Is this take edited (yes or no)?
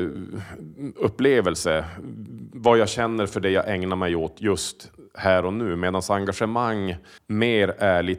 yes